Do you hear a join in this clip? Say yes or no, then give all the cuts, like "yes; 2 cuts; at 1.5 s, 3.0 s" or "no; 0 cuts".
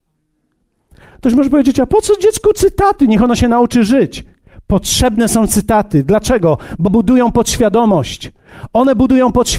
yes; 1 cut; at 6.9 s